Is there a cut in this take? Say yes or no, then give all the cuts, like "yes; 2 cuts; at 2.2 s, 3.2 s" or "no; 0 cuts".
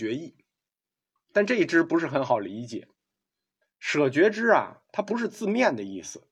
no; 0 cuts